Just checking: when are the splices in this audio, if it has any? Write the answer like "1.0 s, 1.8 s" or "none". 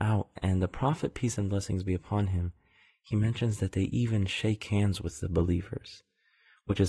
none